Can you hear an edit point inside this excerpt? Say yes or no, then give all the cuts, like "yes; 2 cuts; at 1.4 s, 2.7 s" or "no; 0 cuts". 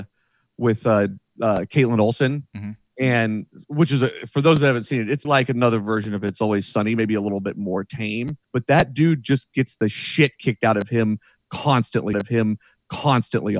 yes; 3 cuts; at 5.2 s, 8.4 s, 12.1 s